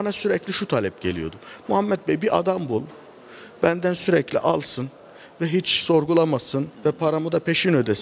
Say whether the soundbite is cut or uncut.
cut